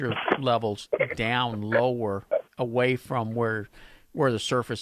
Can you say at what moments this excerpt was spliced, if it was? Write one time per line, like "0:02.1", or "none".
0:02.5